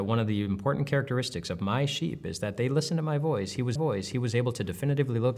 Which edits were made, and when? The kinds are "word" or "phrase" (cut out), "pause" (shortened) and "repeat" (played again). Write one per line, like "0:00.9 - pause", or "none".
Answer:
0:03.8 - repeat